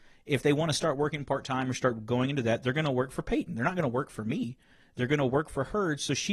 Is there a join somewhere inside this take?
no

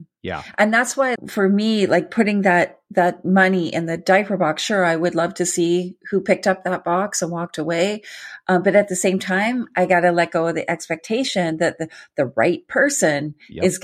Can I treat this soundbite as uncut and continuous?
no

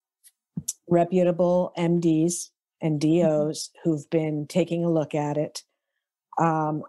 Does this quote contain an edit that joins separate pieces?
no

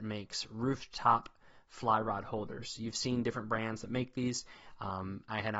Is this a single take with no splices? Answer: yes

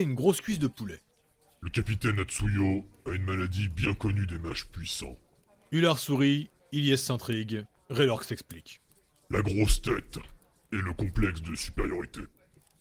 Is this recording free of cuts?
yes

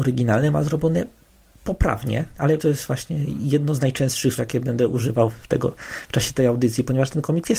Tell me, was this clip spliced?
yes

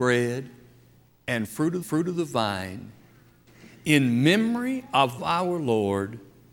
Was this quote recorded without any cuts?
no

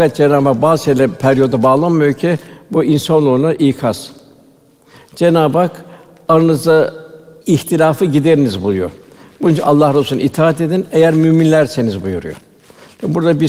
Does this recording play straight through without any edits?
yes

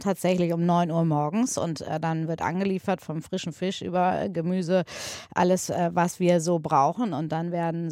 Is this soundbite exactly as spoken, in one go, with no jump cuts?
yes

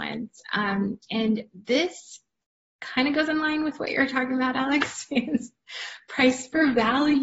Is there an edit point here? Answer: no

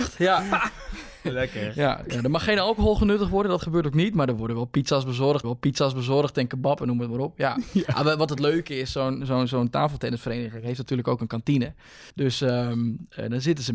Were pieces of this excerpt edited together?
yes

